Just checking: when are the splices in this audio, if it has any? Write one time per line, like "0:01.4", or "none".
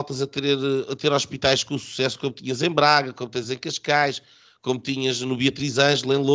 none

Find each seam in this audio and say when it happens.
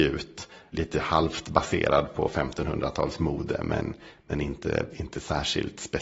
none

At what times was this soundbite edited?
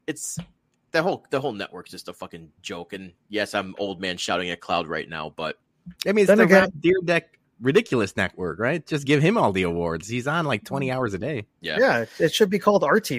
0:02.6
0:06.0
0:11.5

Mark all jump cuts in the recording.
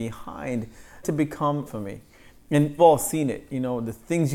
0:01.0
0:01.7
0:02.8

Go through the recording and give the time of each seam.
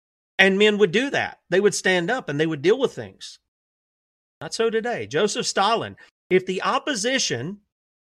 none

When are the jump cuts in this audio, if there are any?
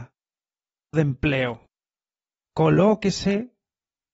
0:00.9

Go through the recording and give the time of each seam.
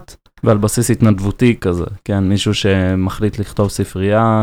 none

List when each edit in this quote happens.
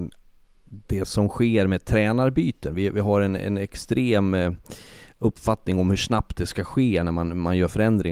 none

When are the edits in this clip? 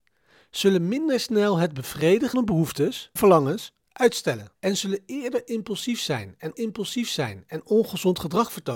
0:02.3
0:03.2
0:04.6
0:06.5

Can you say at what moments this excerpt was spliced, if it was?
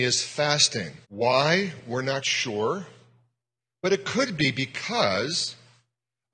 0:01.0

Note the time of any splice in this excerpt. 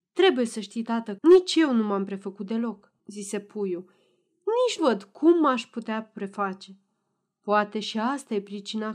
0:01.2
0:03.0
0:04.8

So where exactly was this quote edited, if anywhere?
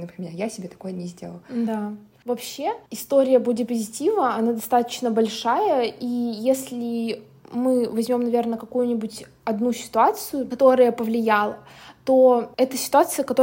0:02.9

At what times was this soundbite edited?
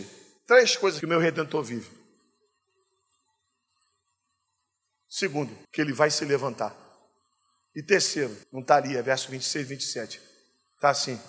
0:01.0
0:05.6
0:08.4

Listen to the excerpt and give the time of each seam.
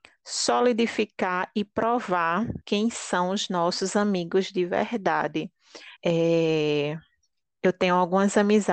0:02.6
0:06.0

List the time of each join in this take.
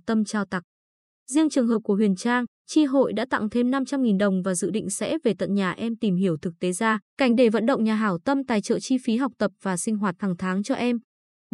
0:07.1

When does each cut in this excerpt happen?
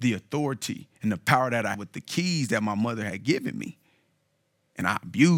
0:01.0
0:01.7

